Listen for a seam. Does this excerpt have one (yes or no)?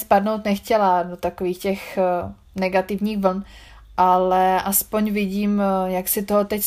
no